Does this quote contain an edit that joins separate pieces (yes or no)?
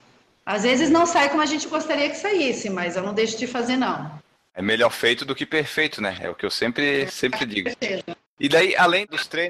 no